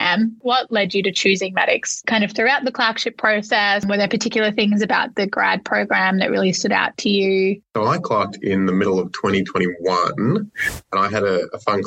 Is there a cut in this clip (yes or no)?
no